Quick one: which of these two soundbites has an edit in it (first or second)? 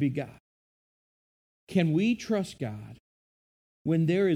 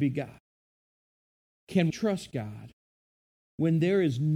second